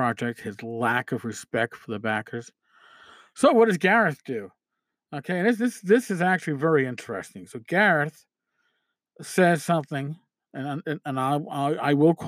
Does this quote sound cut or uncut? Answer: uncut